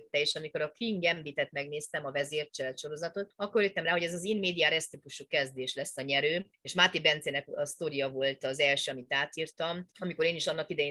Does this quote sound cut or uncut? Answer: uncut